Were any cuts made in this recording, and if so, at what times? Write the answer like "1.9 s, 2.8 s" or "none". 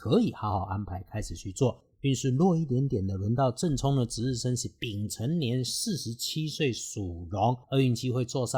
7.6 s